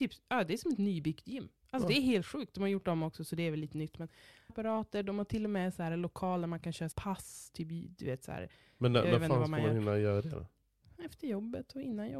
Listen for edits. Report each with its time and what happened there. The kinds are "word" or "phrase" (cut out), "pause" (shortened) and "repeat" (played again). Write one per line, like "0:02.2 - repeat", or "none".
0:04.5 - word
0:06.9 - word